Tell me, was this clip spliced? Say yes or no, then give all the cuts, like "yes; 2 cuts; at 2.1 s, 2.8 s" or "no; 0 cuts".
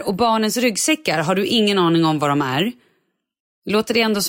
no; 0 cuts